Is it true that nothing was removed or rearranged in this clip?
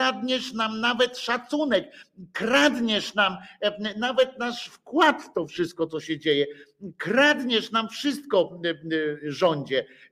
yes; 0 cuts

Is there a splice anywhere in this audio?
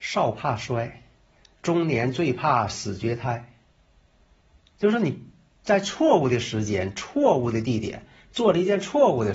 no; 0 cuts

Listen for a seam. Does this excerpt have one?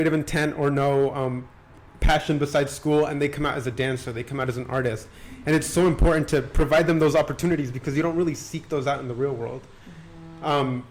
no; 0 cuts

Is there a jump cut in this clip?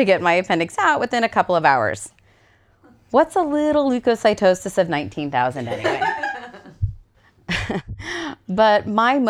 no; 0 cuts

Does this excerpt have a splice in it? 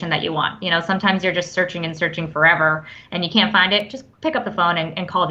yes; 1 cut; at 4.1 s

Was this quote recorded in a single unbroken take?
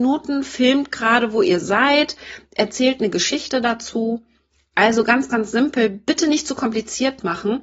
yes; 0 cuts

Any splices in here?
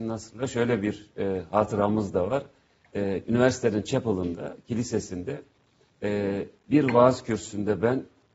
no; 0 cuts

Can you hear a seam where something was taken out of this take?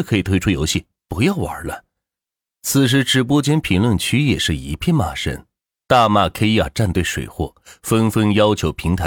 no; 0 cuts

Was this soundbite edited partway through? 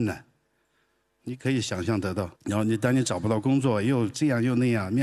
yes; 1 cut; at 2.3 s

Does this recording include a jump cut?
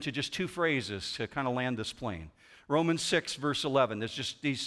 no; 0 cuts

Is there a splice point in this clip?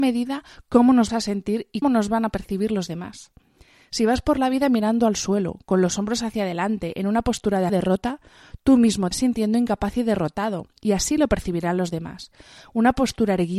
yes; 4 cuts; at 1.1 s, 1.8 s, 7.7 s, 9.1 s

